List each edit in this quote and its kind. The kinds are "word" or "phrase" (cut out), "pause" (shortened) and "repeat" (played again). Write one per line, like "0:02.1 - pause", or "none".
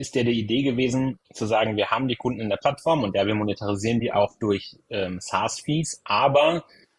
0:01.2 - pause